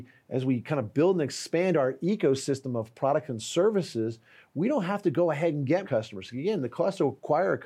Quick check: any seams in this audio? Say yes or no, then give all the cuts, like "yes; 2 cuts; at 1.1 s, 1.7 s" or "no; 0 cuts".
yes; 1 cut; at 5.8 s